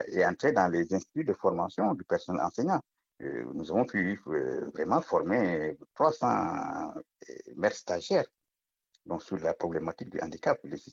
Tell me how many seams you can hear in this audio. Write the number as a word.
zero